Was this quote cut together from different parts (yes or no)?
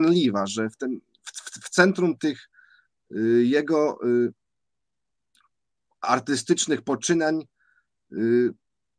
no